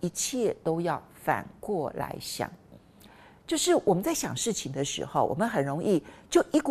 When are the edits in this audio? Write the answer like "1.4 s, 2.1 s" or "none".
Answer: none